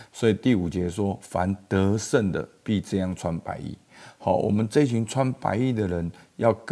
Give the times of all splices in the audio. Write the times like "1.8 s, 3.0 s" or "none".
none